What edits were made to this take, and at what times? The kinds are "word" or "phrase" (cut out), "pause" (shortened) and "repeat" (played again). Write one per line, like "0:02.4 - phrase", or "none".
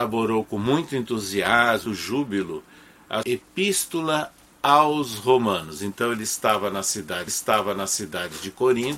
0:01.9 - word
0:03.2 - word
0:07.3 - repeat

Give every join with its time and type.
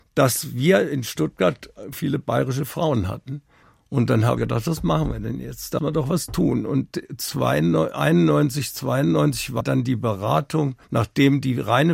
0:01.9 - word
0:03.6 - pause
0:04.4 - phrase
0:05.8 - word
0:09.6 - word
0:10.8 - pause

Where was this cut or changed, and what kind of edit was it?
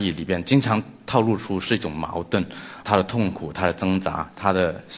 0:02.8 - word

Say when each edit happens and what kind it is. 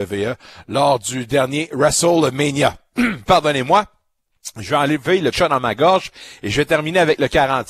0:05.3 - word

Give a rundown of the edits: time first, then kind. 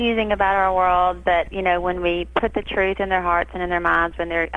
0:01.5 - word

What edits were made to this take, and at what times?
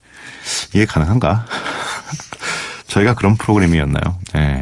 none

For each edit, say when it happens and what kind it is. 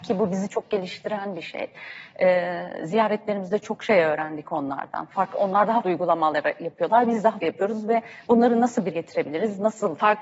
0:05.8 - word
0:07.4 - word
0:08.9 - word

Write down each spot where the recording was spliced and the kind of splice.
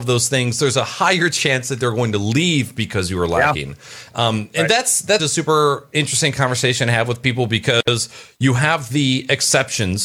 0:05.2 - word

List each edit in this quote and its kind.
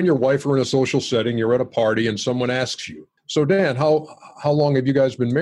0:03.2 - pause

